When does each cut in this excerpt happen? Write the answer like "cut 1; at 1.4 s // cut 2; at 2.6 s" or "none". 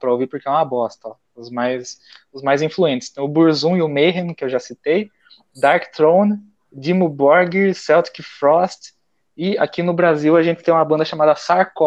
none